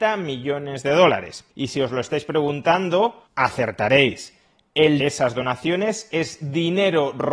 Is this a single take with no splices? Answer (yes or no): no